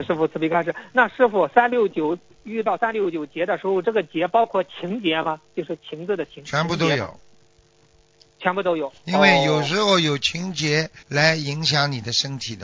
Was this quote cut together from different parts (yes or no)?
yes